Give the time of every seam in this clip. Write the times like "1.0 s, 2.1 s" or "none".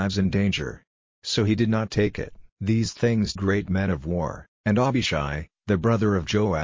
3.4 s, 4.5 s

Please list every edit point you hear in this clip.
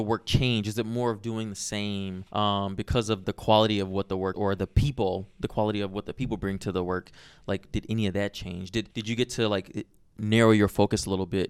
2.3 s, 3.2 s, 4.3 s, 8.9 s

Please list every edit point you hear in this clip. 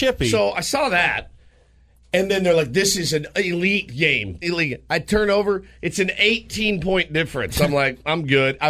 4.4 s

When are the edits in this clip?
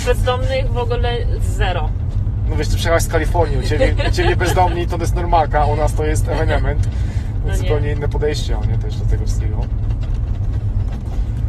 none

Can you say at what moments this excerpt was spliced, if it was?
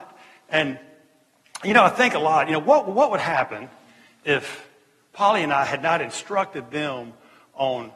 none

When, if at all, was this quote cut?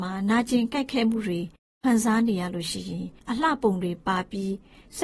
3.2 s

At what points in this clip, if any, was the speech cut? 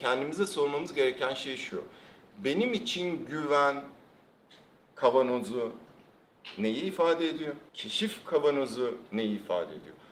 7.7 s

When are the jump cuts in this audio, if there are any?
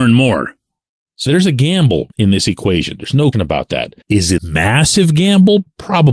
1.3 s, 2.1 s, 3.3 s, 4.0 s, 4.4 s

